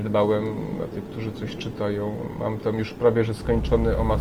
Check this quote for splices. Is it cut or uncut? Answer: uncut